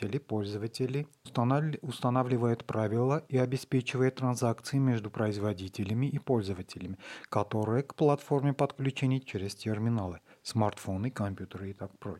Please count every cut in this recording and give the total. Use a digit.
1